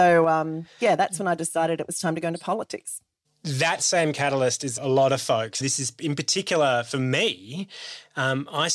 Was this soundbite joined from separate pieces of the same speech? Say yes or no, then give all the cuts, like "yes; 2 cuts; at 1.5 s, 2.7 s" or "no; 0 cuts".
yes; 3 cuts; at 3.2 s, 4.8 s, 5.6 s